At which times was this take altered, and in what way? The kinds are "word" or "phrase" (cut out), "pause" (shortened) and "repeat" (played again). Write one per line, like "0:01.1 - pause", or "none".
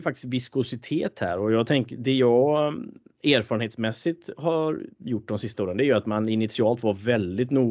none